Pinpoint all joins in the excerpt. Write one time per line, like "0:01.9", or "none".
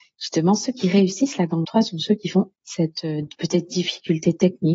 0:01.6
0:02.5